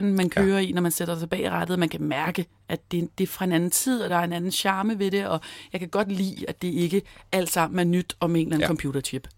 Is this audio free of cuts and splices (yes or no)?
yes